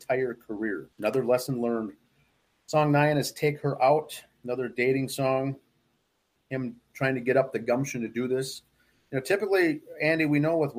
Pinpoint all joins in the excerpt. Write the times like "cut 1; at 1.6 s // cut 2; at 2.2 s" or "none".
cut 1; at 0.9 s